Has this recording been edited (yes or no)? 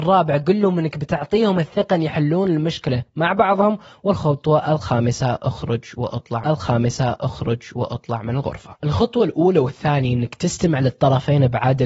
yes